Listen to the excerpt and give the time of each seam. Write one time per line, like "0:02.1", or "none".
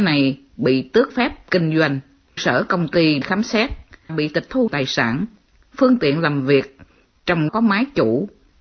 0:01.1
0:02.4
0:03.2
0:04.1
0:04.7
0:07.5